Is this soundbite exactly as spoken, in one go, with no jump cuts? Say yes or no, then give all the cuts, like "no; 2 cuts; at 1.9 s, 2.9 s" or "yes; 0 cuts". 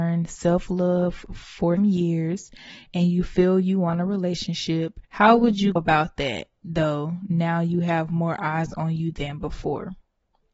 no; 3 cuts; at 1.8 s, 5.0 s, 5.8 s